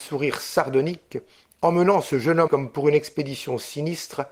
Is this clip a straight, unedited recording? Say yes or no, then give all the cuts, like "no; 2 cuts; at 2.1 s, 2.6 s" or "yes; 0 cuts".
no; 1 cut; at 2.5 s